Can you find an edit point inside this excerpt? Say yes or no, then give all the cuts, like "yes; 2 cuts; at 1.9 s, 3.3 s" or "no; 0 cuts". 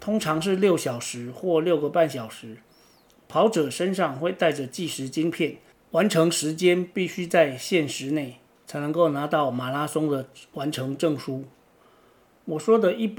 no; 0 cuts